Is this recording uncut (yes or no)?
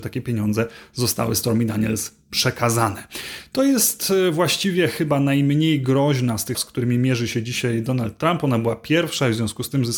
no